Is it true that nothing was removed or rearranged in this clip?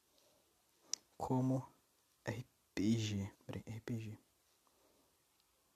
no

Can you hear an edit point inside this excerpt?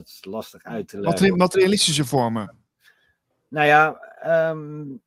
no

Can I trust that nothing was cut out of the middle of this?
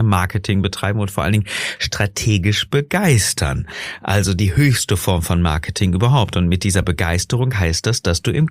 yes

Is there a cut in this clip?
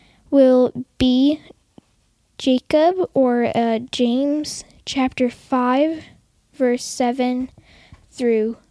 no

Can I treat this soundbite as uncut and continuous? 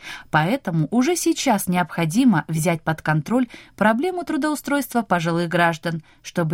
yes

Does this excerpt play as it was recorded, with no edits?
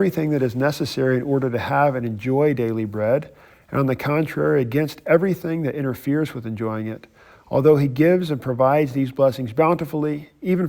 yes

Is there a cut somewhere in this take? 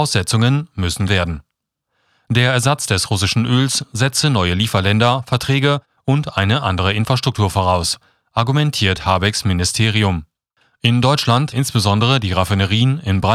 yes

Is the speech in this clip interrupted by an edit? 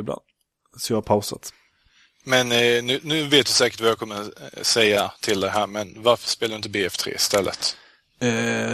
no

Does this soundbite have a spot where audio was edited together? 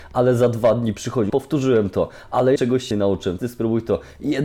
yes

